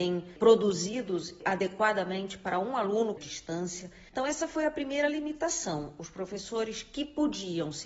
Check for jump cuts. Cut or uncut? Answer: cut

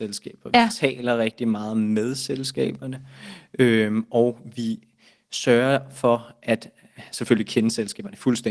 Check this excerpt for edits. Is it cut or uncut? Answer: uncut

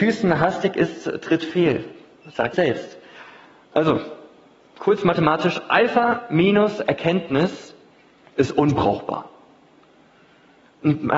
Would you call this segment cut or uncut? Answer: cut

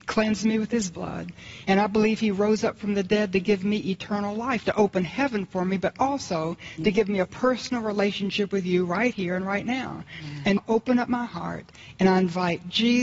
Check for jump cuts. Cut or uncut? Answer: cut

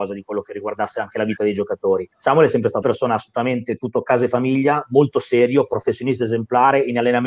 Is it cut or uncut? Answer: cut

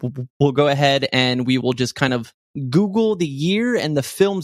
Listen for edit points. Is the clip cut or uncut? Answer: uncut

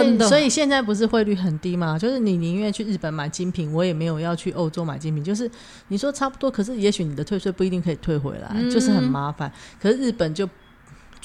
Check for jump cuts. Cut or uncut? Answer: uncut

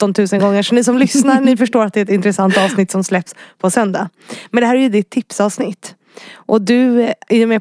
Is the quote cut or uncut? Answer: uncut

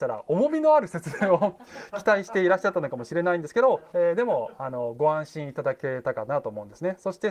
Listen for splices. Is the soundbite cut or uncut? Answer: cut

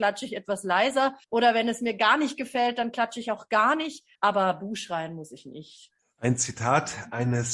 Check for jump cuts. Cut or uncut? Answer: cut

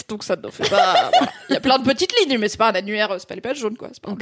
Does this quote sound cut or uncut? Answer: uncut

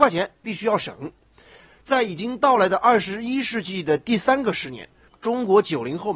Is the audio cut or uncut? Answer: uncut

